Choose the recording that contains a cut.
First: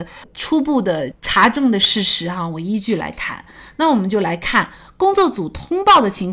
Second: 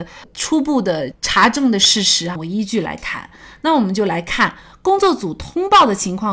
second; 1 cut; at 2.4 s

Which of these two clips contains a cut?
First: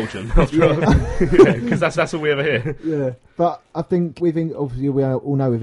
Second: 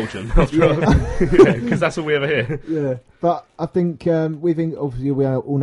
first; 2 cuts; at 1.9 s, 4.2 s

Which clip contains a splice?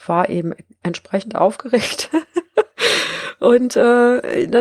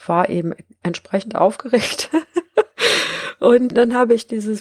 second; 1 cut; at 3.7 s

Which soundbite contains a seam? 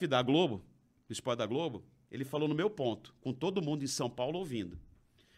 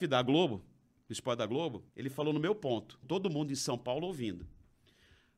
second; 2 cuts; at 1.9 s, 3.0 s

